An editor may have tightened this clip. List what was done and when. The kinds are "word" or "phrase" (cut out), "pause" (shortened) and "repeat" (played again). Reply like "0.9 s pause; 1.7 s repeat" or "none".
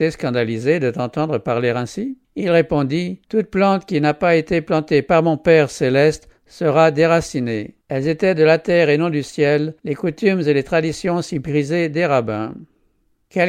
2.2 s pause; 3.2 s pause; 7.8 s pause; 9.8 s pause

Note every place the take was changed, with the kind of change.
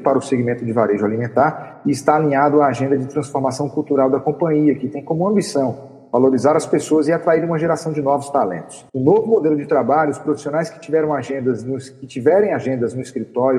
8.9 s pause

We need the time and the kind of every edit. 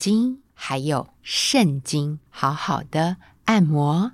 2.3 s pause

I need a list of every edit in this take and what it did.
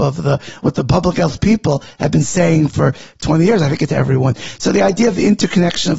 3.9 s word

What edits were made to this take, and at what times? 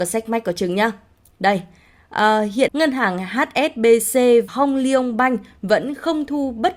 2.7 s word; 4.5 s word

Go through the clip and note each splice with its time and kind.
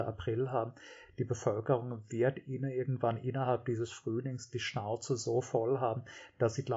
none

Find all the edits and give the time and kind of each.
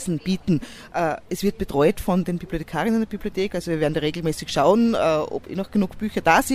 none

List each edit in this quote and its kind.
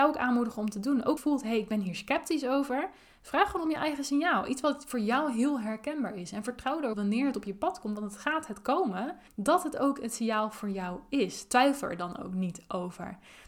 1.2 s phrase; 6.9 s phrase; 9.3 s pause

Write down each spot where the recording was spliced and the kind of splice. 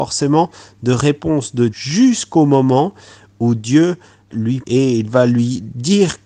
1.7 s word; 4.3 s word; 4.6 s word

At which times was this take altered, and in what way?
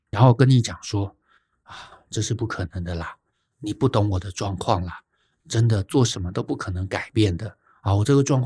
none

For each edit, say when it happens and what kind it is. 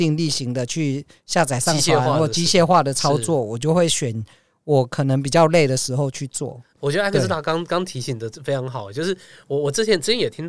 6.8 s word

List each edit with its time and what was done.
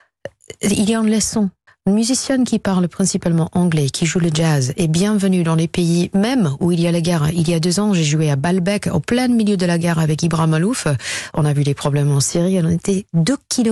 1.7 s pause

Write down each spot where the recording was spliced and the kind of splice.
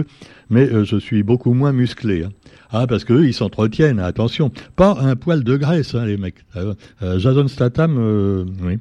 none

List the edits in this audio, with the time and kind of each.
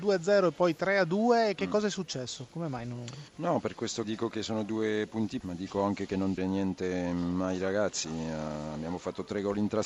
3.3 s pause; 4.0 s word; 5.4 s word; 6.4 s phrase

